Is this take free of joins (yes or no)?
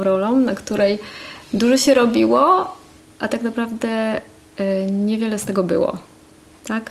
yes